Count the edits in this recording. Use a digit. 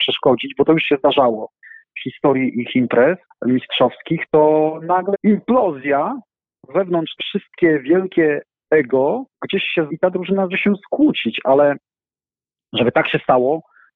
6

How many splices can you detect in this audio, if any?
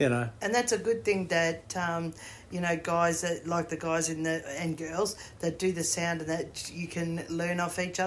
0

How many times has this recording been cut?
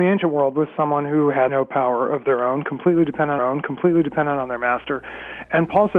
2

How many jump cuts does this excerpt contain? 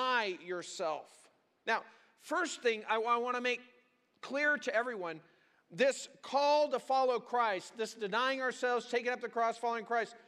0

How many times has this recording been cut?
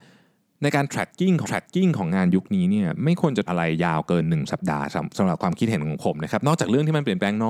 2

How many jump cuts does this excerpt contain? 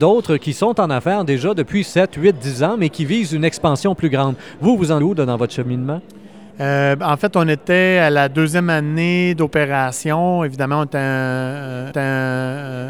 3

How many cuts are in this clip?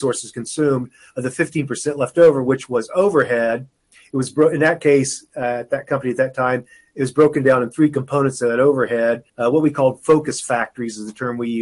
1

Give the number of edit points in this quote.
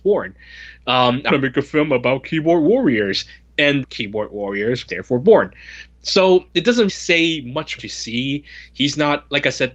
5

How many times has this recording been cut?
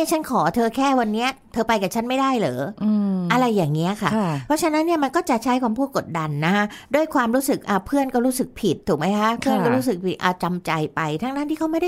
1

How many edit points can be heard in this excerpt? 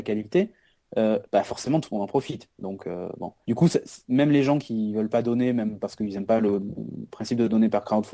1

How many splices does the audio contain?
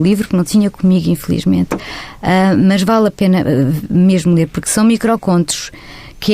0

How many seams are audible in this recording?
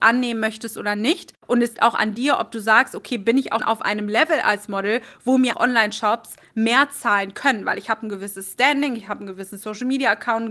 3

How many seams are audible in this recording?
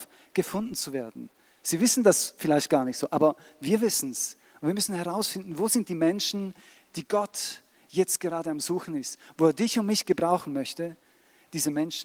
0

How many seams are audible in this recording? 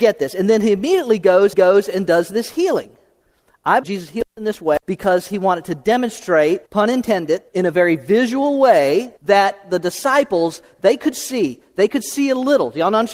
6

